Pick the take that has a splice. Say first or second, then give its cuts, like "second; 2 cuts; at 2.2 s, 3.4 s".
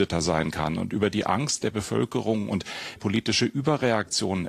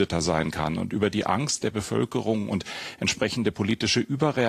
first; 1 cut; at 3.0 s